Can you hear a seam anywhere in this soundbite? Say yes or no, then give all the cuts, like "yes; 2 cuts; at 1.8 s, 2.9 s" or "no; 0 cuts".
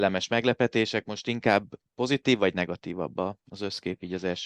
no; 0 cuts